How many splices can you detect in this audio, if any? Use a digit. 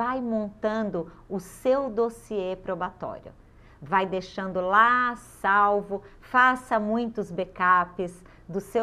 0